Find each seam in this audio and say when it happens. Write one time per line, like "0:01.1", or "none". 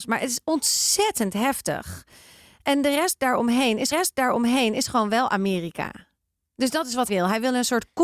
0:03.9
0:07.1